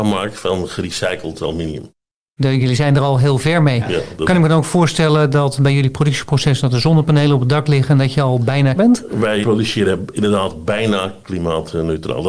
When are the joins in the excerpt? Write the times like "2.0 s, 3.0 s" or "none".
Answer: 8.8 s, 9.4 s